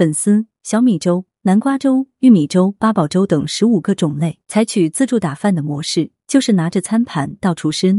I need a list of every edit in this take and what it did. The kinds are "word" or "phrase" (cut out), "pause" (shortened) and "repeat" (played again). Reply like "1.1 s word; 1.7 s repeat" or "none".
4.4 s pause